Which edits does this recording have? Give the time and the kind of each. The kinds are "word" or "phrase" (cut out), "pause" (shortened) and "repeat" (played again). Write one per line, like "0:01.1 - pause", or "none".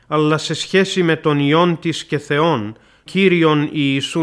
0:03.1 - word